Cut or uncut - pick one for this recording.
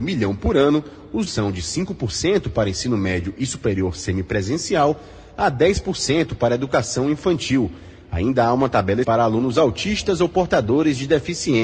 cut